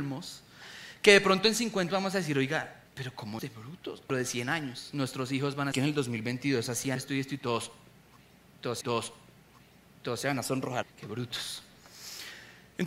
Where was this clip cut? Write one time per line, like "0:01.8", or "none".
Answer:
0:01.9
0:02.9
0:03.4
0:04.1
0:05.7
0:07.0
0:08.8
0:10.8